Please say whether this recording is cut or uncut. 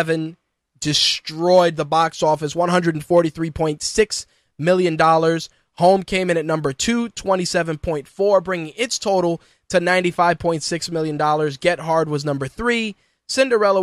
uncut